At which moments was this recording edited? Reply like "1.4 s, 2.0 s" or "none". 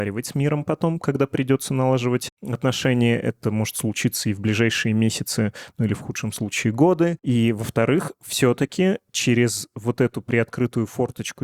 none

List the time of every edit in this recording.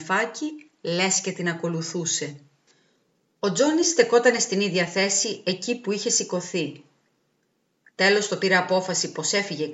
none

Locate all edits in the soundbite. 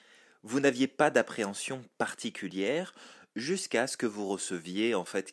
none

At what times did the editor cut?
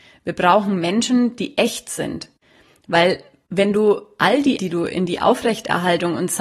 4.6 s

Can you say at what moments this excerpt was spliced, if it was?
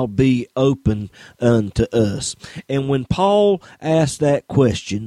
none

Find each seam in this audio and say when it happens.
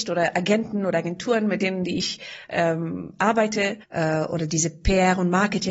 3.8 s

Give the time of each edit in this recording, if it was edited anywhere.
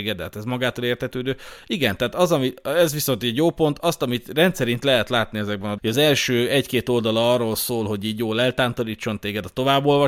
5.8 s

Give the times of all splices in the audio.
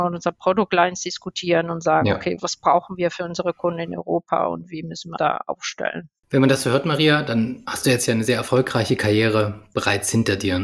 2.4 s, 5.2 s, 6.2 s

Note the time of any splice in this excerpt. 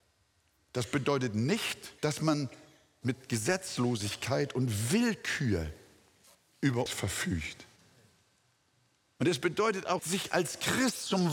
2.0 s, 6.9 s, 10.0 s

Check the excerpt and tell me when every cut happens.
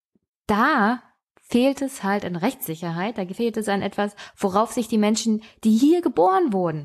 none

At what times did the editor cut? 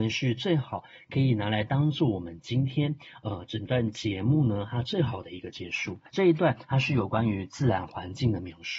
6.1 s

